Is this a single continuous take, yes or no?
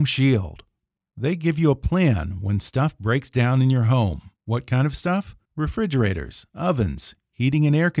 no